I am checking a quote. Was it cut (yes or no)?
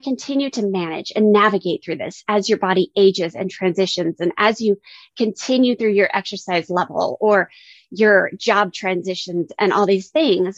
no